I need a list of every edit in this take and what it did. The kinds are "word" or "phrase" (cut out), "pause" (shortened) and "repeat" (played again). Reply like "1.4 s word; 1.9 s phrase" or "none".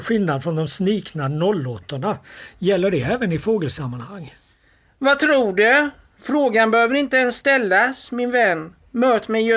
none